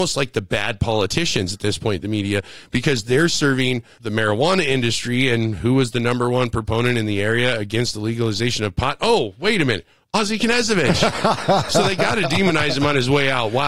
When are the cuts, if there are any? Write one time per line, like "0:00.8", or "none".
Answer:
none